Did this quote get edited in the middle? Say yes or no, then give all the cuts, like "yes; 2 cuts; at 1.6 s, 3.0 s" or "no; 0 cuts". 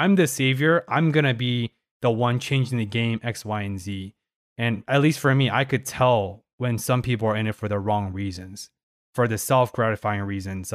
no; 0 cuts